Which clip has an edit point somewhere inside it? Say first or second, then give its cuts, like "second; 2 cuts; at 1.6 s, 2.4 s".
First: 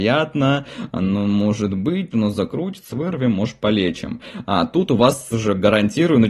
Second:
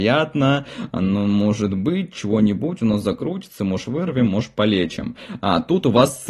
first; 3 cuts; at 2.1 s, 2.9 s, 5.3 s